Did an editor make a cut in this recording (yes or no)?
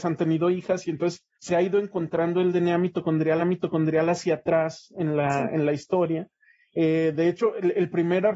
yes